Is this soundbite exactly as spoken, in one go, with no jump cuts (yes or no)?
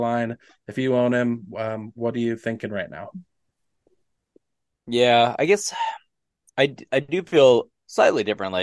yes